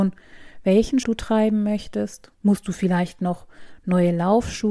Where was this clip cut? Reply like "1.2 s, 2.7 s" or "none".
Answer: 1.0 s, 2.4 s

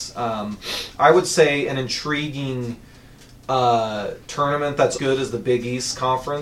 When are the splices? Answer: 5.0 s

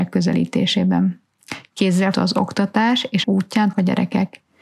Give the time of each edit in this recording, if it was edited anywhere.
2.1 s, 3.2 s, 3.7 s

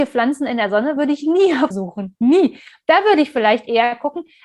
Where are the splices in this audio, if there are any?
1.0 s, 1.7 s

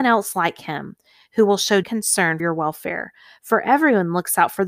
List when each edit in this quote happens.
1.8 s, 2.4 s

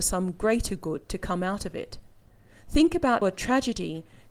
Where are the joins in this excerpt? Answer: 3.2 s

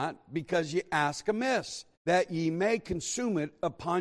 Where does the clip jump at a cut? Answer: 1.9 s

